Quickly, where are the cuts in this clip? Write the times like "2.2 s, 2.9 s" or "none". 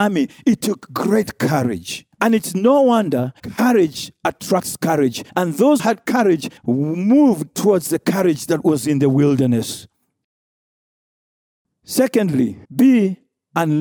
2.1 s, 3.4 s, 5.3 s, 5.8 s, 6.6 s, 12.6 s